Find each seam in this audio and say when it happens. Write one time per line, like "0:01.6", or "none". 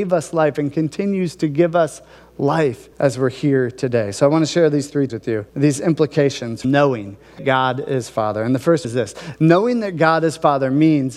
0:02.9
0:05.1
0:05.5
0:06.6
0:07.4
0:08.8